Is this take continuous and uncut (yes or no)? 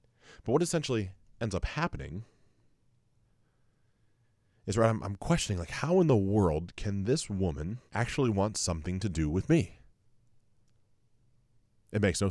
no